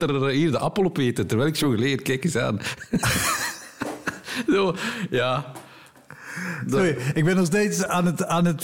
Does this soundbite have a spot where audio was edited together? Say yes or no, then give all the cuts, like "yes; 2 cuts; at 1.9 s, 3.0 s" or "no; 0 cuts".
no; 0 cuts